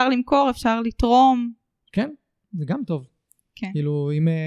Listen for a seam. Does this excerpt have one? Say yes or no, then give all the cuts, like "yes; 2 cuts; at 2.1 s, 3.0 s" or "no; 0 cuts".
no; 0 cuts